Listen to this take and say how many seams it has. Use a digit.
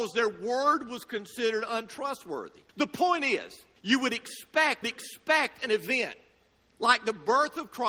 3